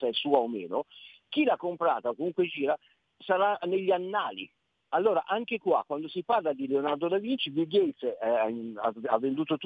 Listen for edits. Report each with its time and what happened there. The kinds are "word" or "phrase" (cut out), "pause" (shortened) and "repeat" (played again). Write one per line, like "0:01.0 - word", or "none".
none